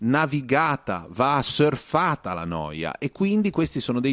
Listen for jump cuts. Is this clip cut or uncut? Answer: uncut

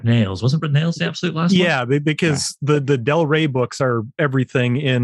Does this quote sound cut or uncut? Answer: uncut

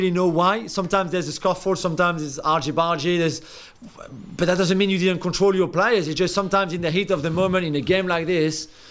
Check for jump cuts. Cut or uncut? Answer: uncut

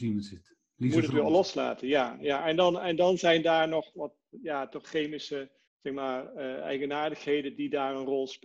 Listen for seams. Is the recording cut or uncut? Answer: cut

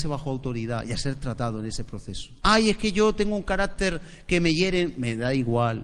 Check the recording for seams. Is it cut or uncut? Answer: cut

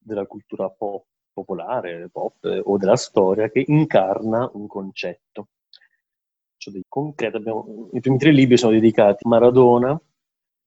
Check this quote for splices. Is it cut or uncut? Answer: cut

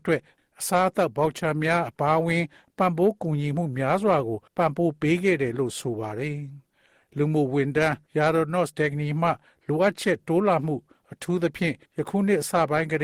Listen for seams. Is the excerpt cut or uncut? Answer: cut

